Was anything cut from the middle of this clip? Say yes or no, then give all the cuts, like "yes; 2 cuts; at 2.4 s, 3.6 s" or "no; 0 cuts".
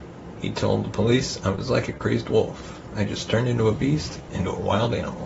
no; 0 cuts